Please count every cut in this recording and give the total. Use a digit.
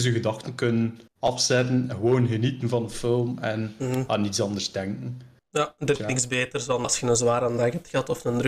3